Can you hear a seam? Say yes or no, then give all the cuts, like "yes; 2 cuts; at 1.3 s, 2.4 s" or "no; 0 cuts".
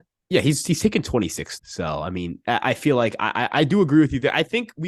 yes; 1 cut; at 1.6 s